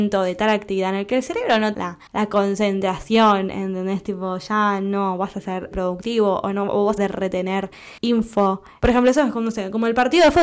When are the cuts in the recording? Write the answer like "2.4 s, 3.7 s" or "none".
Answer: 1.7 s, 2.1 s, 5.7 s, 7.0 s, 8.0 s

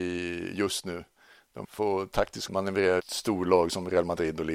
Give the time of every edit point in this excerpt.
1.6 s, 2.5 s, 3.0 s

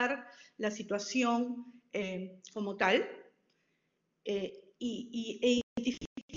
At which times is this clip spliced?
none

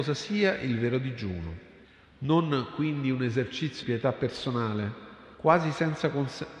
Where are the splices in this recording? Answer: 1.8 s, 3.8 s, 5.3 s

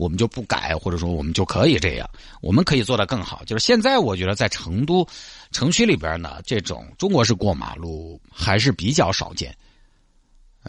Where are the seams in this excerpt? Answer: 8.2 s

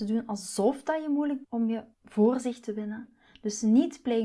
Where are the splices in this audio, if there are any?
1.4 s, 1.9 s

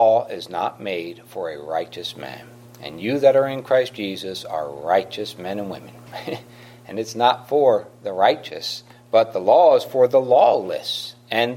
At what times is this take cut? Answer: 2.6 s, 8.9 s

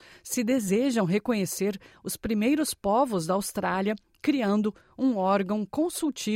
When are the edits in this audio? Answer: none

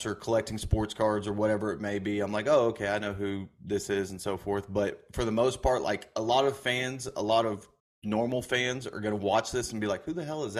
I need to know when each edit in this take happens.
7.8 s

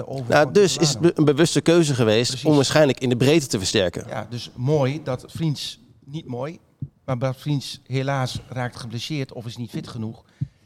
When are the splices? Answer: 5.3 s

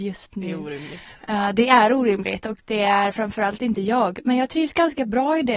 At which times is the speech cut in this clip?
none

